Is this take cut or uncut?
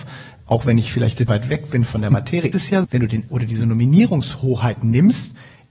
cut